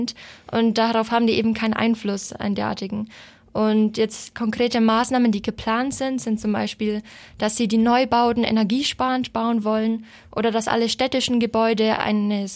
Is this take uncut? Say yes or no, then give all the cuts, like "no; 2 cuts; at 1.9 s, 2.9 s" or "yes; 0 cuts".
yes; 0 cuts